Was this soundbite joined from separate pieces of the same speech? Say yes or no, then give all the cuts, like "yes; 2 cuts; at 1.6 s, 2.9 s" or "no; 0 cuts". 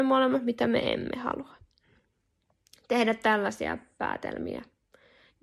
no; 0 cuts